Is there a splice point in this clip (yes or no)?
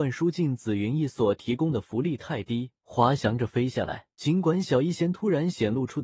yes